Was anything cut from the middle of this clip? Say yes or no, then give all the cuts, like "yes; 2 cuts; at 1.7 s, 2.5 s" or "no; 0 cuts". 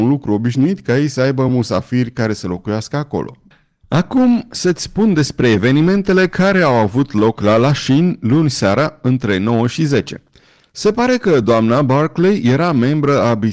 no; 0 cuts